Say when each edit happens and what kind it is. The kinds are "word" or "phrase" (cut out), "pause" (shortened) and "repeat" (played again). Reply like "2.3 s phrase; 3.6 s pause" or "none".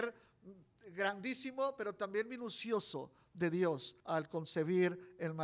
4.0 s pause